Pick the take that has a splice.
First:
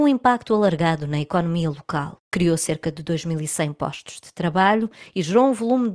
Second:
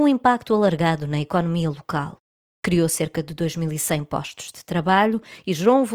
first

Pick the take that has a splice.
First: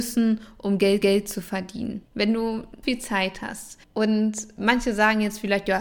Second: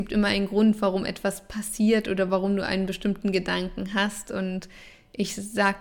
first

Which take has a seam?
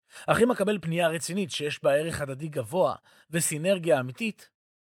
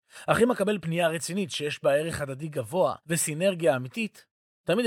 second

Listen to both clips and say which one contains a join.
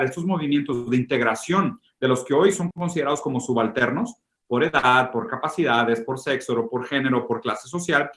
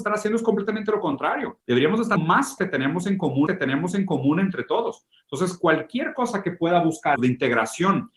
second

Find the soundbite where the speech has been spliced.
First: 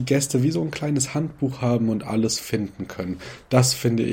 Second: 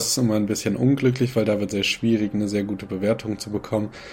second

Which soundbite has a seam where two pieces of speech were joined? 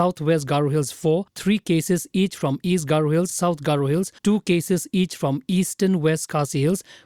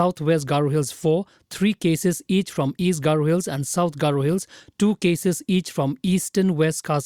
first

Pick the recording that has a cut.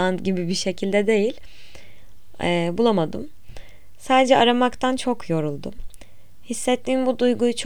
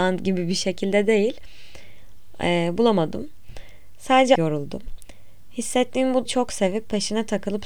second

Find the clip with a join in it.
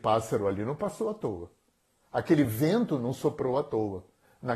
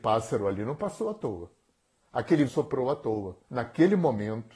second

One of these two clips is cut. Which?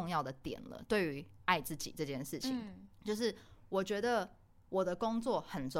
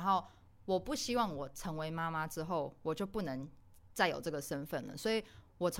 first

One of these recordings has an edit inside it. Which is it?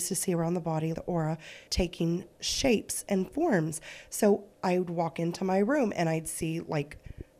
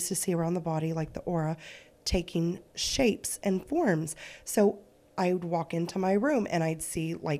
first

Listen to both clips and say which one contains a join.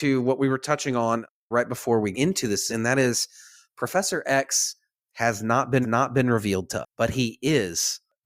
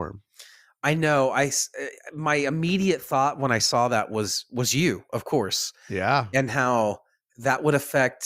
first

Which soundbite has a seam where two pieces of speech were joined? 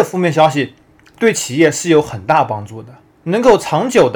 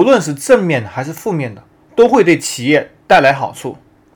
first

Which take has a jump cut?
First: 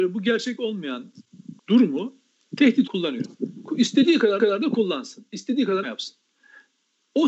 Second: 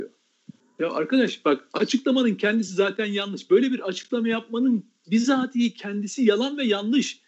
first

